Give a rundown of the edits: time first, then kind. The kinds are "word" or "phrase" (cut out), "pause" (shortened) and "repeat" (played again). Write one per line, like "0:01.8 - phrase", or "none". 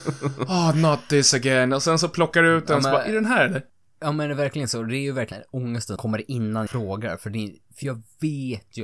0:03.7 - pause
0:05.3 - phrase
0:06.0 - word
0:06.7 - phrase